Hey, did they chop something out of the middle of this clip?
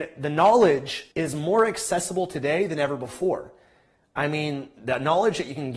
yes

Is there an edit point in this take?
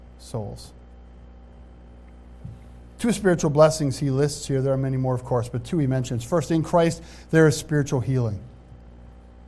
no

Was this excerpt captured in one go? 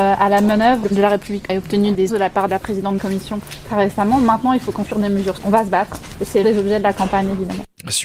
no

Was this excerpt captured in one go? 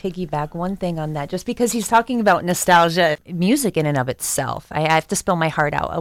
yes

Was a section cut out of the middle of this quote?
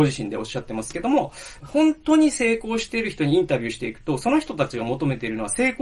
yes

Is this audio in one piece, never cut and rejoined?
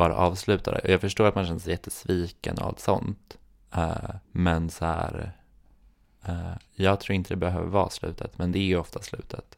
no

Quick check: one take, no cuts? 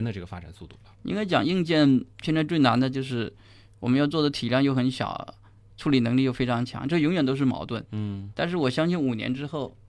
no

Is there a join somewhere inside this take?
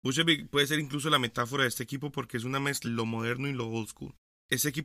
yes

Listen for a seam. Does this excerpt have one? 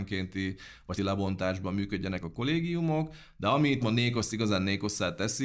yes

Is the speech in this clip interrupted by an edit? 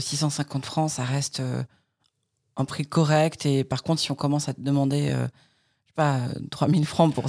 no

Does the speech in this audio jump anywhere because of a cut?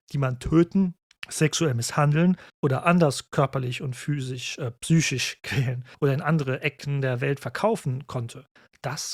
yes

